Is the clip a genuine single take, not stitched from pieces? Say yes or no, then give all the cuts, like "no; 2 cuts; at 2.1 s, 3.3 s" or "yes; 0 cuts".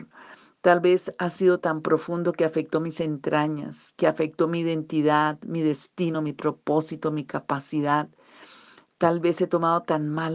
yes; 0 cuts